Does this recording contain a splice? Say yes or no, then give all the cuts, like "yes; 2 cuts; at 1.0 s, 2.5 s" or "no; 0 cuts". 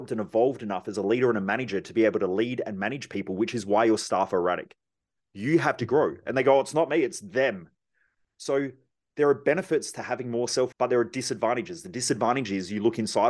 yes; 1 cut; at 10.7 s